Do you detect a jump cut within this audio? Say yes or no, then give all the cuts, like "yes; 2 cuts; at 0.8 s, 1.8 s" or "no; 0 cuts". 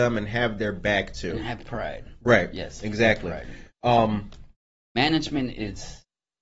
no; 0 cuts